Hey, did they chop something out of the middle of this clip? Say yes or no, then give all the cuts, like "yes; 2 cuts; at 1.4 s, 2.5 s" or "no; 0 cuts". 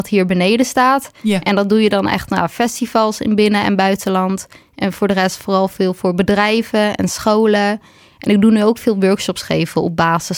no; 0 cuts